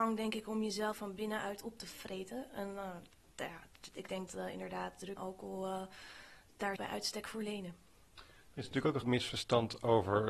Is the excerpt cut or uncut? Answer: cut